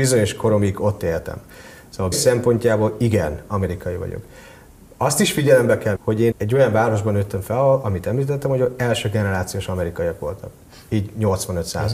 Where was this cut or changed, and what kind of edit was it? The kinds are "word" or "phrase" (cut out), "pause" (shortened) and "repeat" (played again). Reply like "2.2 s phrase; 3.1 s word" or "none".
2.1 s word; 6.0 s word; 6.3 s word